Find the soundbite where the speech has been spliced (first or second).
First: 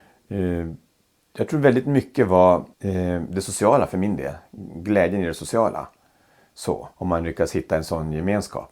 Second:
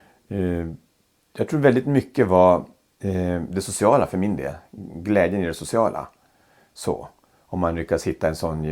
first